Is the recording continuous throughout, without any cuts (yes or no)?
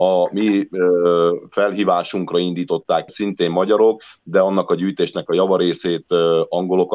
no